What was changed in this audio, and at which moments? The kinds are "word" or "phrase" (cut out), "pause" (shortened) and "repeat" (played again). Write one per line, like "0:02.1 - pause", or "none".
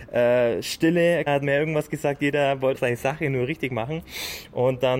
0:01.3 - word
0:02.7 - word